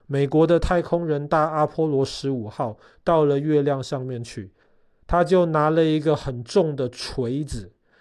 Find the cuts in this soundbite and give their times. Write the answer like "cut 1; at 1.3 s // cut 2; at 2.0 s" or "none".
none